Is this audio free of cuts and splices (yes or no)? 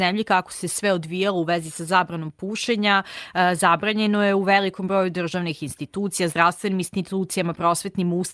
yes